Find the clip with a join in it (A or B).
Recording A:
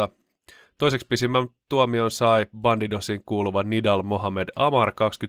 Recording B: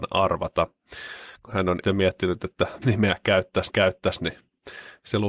B